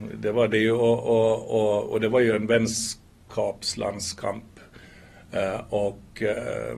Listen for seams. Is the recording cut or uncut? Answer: uncut